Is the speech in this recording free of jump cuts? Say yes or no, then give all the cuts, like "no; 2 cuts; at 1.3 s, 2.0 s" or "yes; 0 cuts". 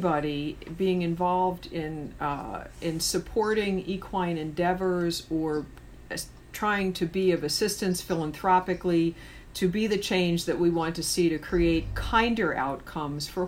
yes; 0 cuts